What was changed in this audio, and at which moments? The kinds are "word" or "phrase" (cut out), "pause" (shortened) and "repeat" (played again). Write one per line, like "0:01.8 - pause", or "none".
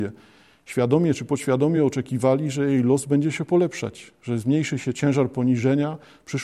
none